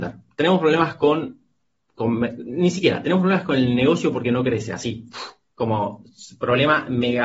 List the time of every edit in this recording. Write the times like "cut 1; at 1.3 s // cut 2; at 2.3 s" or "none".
none